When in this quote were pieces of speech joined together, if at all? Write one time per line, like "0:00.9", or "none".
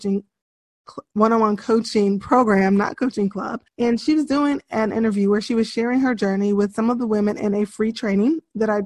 0:03.7